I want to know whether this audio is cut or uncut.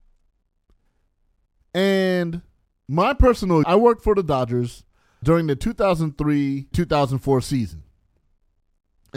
cut